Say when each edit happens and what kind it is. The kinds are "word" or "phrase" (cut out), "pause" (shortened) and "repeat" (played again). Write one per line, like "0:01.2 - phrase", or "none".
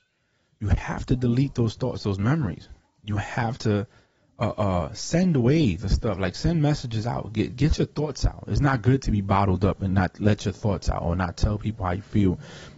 none